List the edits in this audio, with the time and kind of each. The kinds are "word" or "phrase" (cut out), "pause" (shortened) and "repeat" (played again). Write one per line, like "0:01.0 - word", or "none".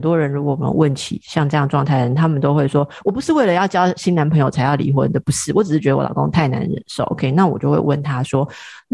none